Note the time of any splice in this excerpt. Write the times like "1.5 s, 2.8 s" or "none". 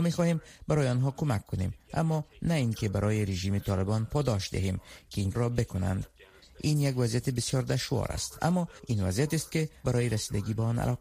5.3 s, 9.8 s